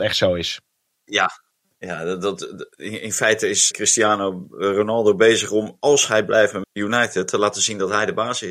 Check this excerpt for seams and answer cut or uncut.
cut